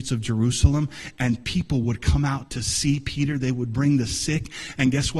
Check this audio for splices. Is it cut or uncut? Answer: uncut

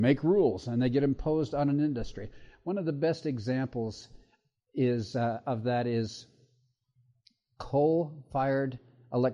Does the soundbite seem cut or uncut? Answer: uncut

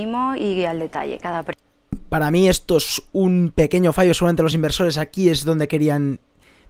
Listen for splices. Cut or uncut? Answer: uncut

